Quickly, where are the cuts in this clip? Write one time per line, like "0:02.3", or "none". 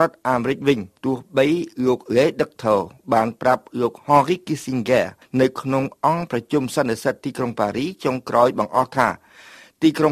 0:01.0
0:05.2